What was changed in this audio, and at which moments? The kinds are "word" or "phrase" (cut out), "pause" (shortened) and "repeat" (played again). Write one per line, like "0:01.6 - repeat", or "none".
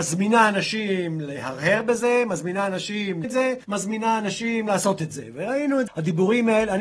0:03.2 - word
0:03.6 - pause
0:05.9 - word